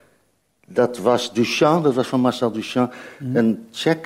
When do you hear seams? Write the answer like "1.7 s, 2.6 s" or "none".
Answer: none

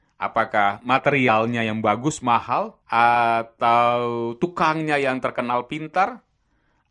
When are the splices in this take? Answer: 2.8 s

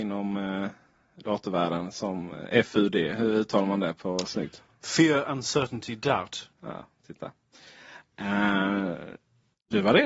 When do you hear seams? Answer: 6.5 s

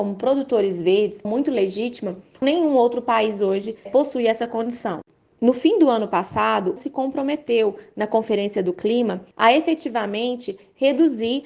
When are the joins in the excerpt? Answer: 1.2 s, 2.4 s, 3.9 s, 6.8 s, 9.3 s

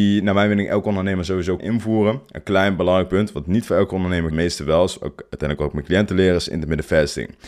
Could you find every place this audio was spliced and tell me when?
1.6 s, 4.3 s

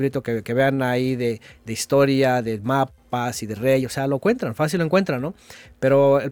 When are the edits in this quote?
none

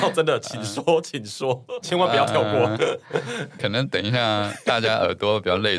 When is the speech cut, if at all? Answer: 1.8 s

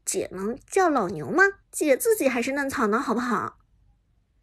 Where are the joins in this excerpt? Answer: 1.6 s

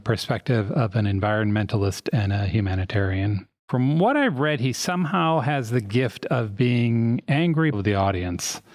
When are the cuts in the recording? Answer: 3.6 s, 7.7 s

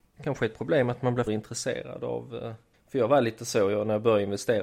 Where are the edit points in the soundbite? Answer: 1.3 s, 2.7 s

